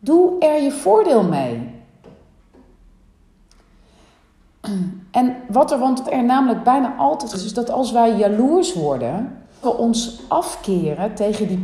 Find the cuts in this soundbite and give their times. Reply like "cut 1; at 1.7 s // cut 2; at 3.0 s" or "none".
cut 1; at 6.0 s // cut 2; at 7.3 s // cut 3; at 9.6 s